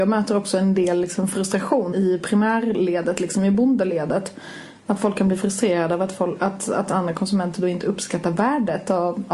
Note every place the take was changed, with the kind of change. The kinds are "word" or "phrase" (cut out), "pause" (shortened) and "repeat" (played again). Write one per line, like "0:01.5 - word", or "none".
0:01.9 - word

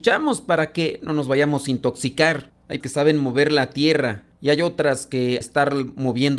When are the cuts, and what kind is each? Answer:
0:02.8 - word
0:05.4 - word

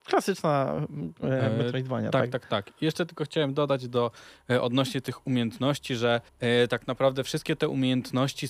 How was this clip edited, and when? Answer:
0:06.3 - pause

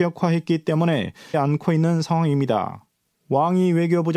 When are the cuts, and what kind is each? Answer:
0:01.3 - word

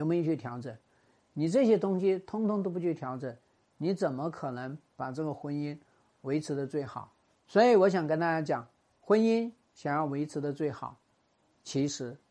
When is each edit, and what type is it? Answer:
none

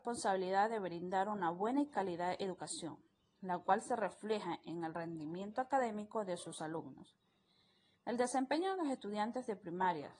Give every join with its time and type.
none

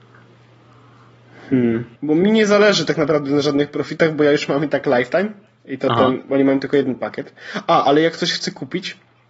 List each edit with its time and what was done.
0:01.9 - pause

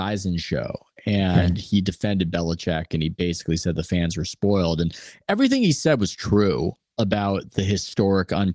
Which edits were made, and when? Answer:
none

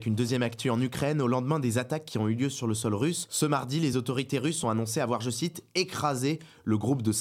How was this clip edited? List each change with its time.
none

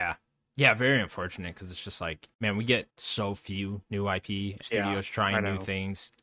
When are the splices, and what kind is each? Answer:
0:02.3 - pause
0:02.9 - pause
0:04.6 - phrase

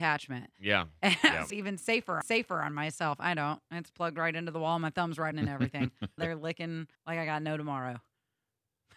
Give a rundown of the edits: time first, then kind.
0:01.5 - phrase
0:02.2 - repeat
0:05.3 - phrase
0:06.2 - word
0:06.9 - pause

